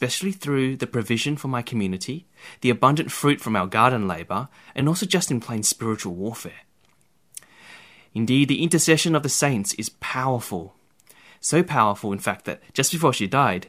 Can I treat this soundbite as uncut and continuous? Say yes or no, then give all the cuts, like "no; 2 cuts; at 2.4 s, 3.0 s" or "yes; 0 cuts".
yes; 0 cuts